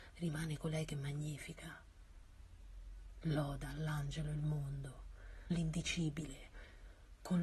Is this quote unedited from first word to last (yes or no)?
no